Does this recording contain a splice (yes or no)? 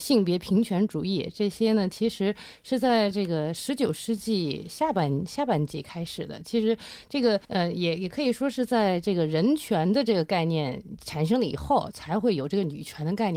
yes